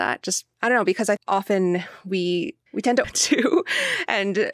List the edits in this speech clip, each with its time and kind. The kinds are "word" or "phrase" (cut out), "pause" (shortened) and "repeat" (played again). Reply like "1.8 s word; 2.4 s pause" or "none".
1.2 s word; 2.7 s pause; 3.0 s word